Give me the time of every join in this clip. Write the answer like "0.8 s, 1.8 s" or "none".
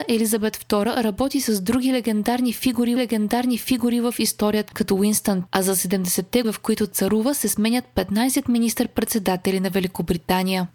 3.0 s, 4.7 s, 5.5 s, 6.4 s